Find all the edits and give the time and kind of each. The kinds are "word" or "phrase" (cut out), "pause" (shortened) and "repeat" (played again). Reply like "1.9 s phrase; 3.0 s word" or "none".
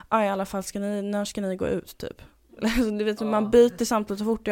none